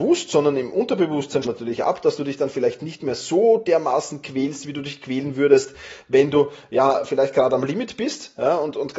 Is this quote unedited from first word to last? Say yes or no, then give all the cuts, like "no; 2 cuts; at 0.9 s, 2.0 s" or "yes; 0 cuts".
no; 1 cut; at 1.4 s